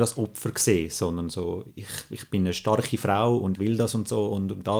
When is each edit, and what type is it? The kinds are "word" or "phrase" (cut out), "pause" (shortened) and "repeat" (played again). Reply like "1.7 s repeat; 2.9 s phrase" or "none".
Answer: 1.7 s pause; 3.5 s word